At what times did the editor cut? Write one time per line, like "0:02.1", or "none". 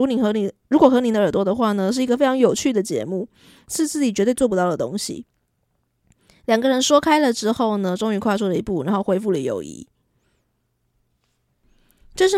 none